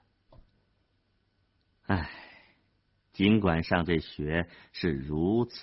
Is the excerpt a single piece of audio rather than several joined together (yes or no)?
yes